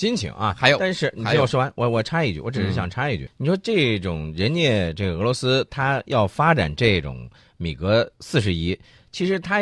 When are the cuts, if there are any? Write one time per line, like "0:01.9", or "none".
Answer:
0:03.3

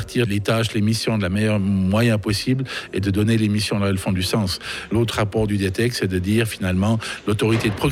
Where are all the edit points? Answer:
none

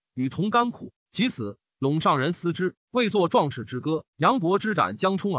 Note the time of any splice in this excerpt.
0:04.1

